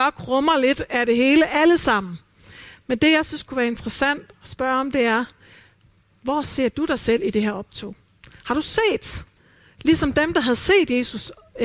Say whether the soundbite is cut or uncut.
cut